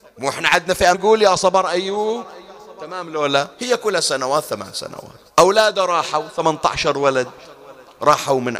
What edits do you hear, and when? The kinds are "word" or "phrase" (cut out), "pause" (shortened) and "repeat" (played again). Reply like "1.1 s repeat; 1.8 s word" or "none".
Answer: 0.9 s word; 3.5 s pause; 4.0 s word; 5.3 s pause